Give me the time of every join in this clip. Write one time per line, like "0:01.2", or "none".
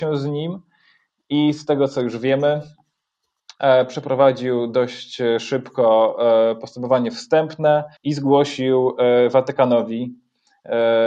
0:08.0